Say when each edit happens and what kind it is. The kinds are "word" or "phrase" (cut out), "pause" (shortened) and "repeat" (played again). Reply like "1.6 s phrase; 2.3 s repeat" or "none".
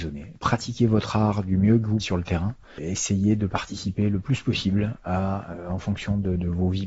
2.0 s word